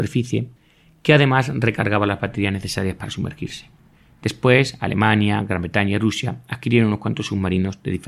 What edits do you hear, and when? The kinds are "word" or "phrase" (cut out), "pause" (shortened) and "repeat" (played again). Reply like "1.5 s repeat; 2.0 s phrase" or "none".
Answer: none